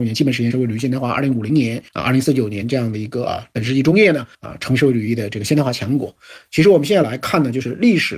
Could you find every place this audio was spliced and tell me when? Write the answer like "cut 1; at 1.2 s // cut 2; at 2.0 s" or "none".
cut 1; at 1.9 s // cut 2; at 4.3 s